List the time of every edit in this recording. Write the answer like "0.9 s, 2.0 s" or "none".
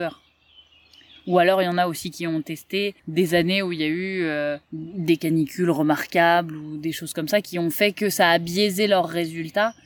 3.0 s, 4.6 s